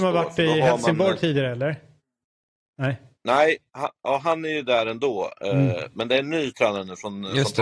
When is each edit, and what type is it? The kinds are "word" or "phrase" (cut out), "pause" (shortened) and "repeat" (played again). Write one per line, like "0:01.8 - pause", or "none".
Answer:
none